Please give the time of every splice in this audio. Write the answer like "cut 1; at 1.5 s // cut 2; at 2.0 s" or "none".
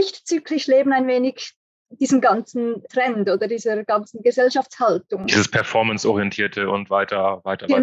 cut 1; at 2.9 s